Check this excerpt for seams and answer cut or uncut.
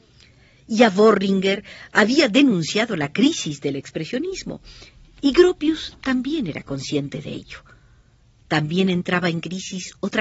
uncut